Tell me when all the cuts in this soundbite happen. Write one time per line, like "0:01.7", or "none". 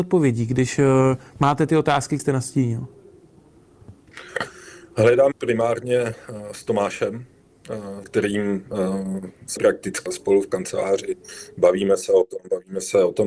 0:01.7
0:02.2
0:05.3
0:08.0
0:09.6
0:10.1